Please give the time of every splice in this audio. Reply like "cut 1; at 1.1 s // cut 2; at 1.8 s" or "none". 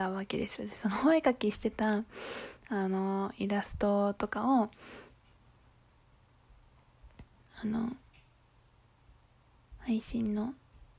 none